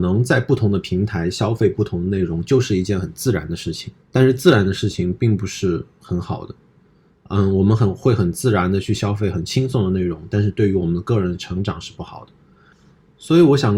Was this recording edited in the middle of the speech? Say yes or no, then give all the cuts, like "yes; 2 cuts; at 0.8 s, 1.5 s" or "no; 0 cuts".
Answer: yes; 1 cut; at 4.0 s